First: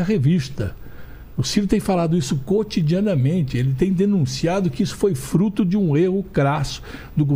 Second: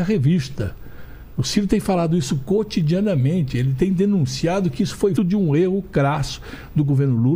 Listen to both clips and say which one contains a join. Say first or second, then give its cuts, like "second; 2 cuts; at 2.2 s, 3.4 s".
second; 1 cut; at 5.2 s